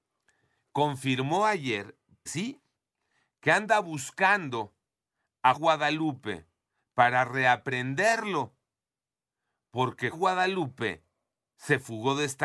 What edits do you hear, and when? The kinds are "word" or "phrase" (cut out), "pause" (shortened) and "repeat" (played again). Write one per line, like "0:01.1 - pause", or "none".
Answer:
0:02.3 - phrase
0:05.5 - word
0:10.1 - word